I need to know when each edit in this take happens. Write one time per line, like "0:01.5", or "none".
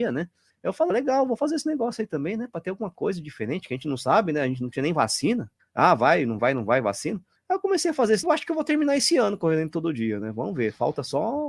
0:00.9
0:06.4
0:08.2